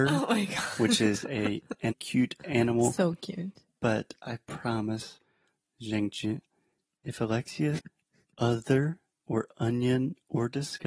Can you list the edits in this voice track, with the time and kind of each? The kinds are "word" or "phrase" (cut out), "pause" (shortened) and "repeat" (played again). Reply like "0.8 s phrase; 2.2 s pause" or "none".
1.9 s word; 7.8 s word